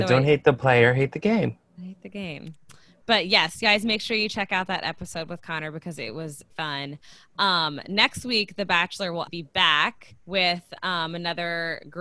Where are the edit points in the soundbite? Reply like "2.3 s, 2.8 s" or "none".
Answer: 6.5 s, 9.3 s, 10.2 s